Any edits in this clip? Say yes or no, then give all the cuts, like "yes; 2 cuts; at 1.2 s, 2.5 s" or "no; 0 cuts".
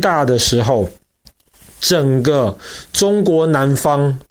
no; 0 cuts